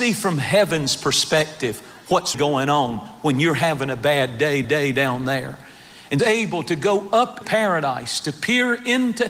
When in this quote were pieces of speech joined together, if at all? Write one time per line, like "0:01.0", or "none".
0:02.3
0:04.6
0:06.2
0:07.4